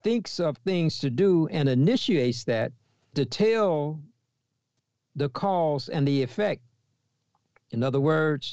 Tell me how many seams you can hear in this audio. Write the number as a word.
two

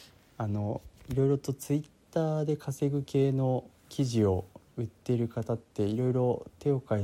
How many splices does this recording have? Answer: one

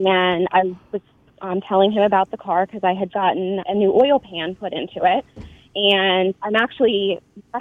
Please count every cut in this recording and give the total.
two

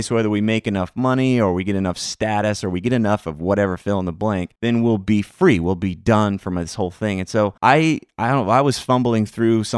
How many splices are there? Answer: two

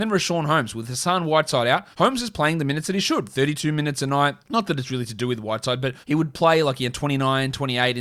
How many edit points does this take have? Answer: three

